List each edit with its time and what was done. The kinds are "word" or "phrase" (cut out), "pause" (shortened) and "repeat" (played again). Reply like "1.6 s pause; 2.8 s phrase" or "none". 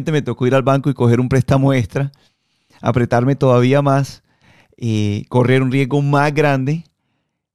none